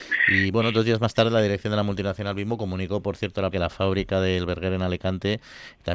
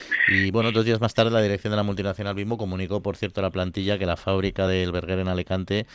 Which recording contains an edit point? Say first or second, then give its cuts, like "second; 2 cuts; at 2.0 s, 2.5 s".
first; 1 cut; at 3.5 s